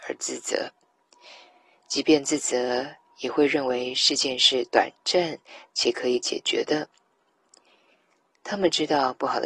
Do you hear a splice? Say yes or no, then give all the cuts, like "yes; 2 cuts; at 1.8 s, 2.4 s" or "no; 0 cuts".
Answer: no; 0 cuts